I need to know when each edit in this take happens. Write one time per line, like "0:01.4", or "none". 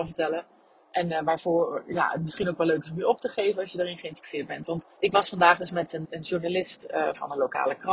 0:05.0
0:06.0